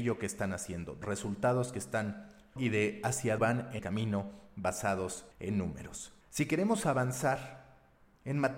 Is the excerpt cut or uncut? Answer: cut